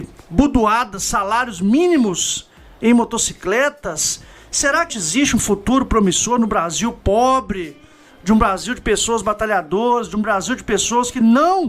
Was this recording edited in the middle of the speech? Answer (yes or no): yes